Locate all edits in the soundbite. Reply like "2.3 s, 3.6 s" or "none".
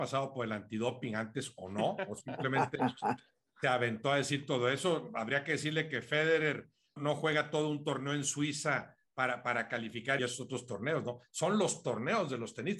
7.0 s, 10.2 s